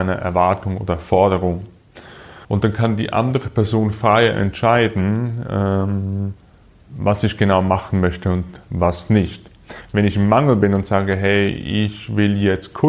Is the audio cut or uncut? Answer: cut